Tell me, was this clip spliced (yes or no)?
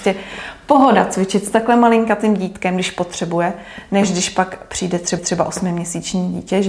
yes